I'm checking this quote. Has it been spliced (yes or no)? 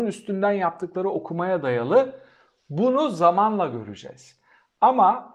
no